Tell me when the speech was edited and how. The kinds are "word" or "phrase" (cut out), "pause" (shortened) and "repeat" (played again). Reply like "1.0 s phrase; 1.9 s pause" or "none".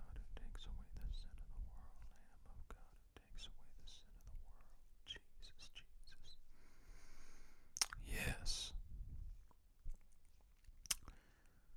none